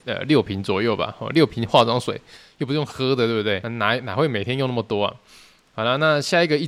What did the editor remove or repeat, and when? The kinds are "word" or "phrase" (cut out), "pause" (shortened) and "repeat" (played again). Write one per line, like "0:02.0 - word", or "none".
none